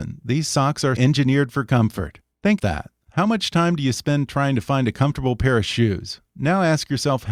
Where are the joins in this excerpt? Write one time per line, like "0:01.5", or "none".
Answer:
0:01.0
0:02.6